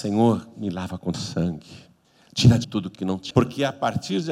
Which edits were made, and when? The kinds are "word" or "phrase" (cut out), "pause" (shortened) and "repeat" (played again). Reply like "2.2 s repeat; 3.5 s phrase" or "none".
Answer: 1.1 s word; 2.0 s pause; 2.6 s word; 2.9 s phrase; 3.3 s word